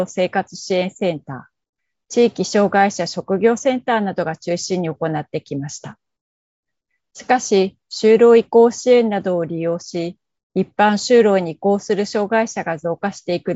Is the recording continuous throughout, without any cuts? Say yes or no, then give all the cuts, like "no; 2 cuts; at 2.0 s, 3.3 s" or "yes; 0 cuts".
yes; 0 cuts